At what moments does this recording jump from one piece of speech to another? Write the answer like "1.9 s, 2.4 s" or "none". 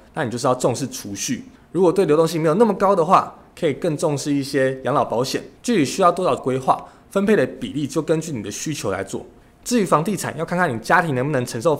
1.5 s, 5.6 s, 6.4 s, 9.4 s